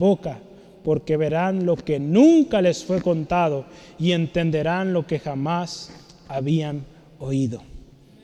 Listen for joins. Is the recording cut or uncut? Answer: uncut